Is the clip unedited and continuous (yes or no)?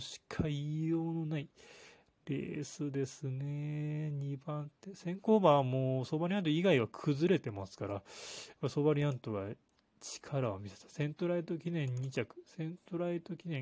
yes